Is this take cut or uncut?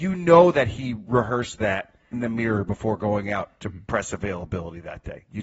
cut